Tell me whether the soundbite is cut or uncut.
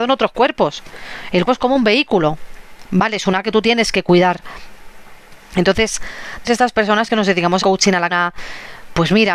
cut